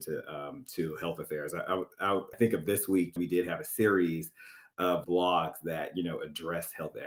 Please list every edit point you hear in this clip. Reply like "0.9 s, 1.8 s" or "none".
2.3 s, 3.2 s, 5.0 s

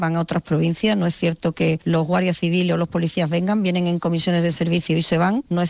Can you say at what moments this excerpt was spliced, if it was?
none

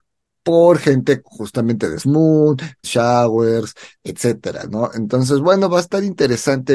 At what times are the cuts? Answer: 1.2 s, 2.0 s, 2.8 s

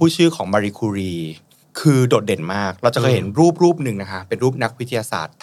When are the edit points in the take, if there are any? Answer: 1.6 s

